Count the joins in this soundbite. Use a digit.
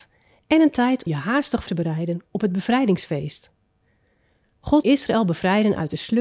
3